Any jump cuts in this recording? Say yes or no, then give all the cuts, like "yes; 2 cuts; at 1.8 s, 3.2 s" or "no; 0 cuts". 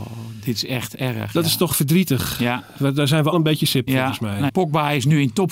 yes; 3 cuts; at 3.3 s, 3.9 s, 4.5 s